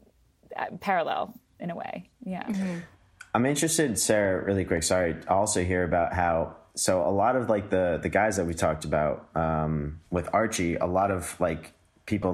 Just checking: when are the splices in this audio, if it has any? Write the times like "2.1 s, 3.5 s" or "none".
2.1 s, 10.1 s

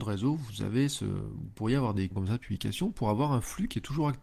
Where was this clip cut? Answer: 2.1 s

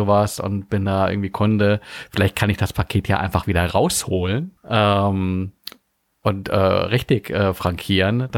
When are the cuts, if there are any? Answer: 4.6 s

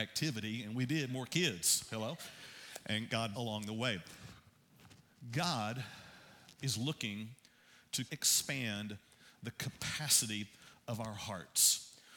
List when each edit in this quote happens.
1.1 s, 3.3 s, 8.1 s

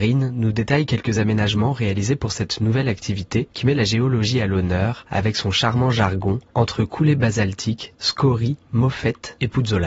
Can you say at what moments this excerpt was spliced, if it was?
none

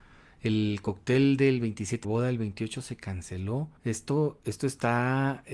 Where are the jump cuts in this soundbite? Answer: 2.0 s, 3.8 s

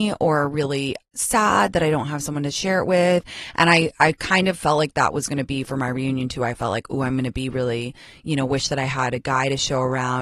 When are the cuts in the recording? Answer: none

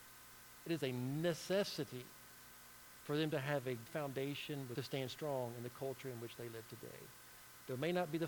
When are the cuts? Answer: 3.9 s, 4.8 s

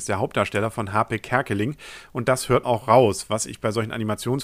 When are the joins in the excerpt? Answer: 2.6 s

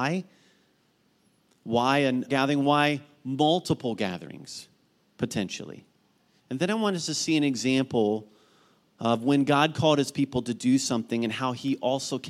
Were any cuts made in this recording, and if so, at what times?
2.3 s

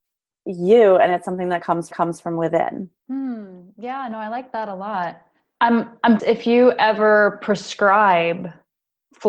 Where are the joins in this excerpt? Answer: 1.9 s, 3.0 s, 6.2 s

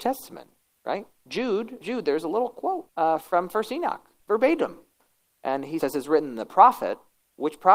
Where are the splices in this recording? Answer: 1.8 s, 2.9 s, 4.2 s, 5.8 s

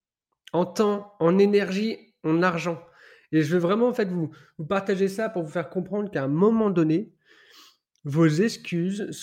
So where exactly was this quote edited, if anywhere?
none

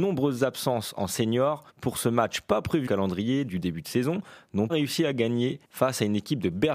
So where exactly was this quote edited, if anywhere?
1.7 s, 2.9 s, 4.7 s, 5.6 s

